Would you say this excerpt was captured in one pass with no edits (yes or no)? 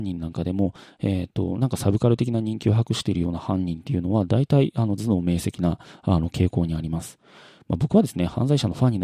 yes